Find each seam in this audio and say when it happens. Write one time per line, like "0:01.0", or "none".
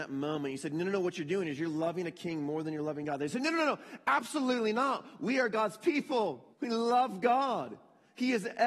0:06.5